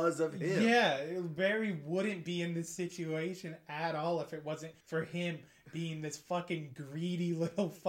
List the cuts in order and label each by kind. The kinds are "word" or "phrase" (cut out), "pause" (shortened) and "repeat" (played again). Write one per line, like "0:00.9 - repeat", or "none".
0:04.8 - pause